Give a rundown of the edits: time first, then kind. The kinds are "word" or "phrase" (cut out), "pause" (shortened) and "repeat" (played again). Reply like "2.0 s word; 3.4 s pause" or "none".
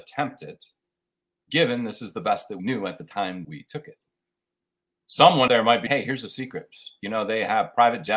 1.4 s word; 2.6 s word; 3.4 s word; 5.5 s word; 5.9 s word

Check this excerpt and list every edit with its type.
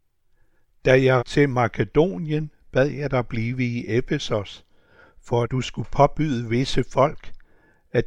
1.2 s word; 5.4 s word

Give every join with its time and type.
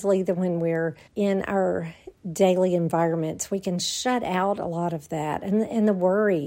1.1 s pause; 2.2 s pause

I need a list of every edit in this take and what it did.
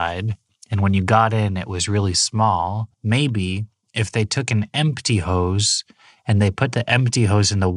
2.9 s pause

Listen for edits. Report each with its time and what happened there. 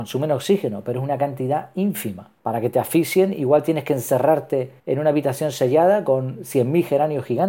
2.4 s pause; 4.8 s pause

